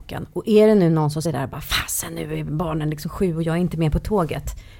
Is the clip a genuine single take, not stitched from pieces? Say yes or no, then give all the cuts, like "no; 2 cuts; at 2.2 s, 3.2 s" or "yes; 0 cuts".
no; 1 cut; at 1.2 s